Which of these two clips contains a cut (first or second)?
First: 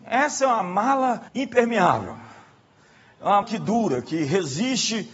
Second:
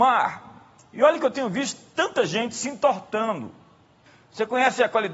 first